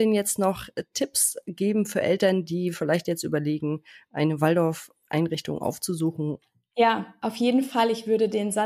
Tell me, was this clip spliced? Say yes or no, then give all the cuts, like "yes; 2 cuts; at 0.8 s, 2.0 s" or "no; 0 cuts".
no; 0 cuts